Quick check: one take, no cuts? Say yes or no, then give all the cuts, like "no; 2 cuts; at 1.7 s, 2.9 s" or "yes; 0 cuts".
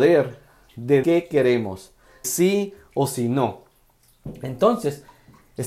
no; 2 cuts; at 1.0 s, 2.2 s